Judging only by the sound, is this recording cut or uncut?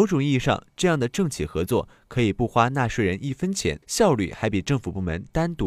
cut